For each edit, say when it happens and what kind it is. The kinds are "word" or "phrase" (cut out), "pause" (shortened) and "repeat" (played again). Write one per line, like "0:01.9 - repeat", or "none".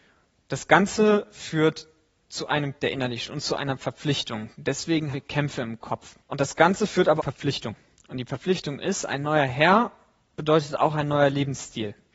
0:02.8 - word
0:03.2 - word
0:05.1 - word
0:06.2 - pause
0:07.2 - phrase